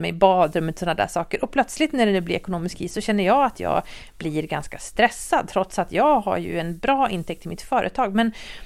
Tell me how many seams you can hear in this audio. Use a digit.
0